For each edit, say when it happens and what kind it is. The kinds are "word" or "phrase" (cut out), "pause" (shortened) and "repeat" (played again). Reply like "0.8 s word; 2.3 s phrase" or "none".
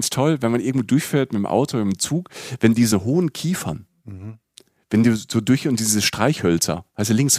none